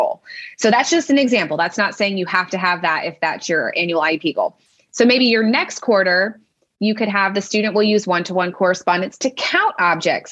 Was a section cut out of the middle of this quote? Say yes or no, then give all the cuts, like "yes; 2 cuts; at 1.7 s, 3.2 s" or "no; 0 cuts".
no; 0 cuts